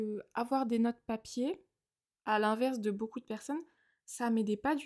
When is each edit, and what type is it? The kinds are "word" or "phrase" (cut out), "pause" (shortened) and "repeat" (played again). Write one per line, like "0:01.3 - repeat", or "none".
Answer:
none